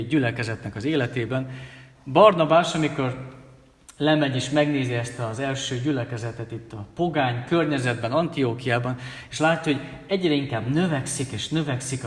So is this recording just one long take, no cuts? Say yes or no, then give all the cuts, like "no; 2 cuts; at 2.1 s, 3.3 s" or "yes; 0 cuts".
yes; 0 cuts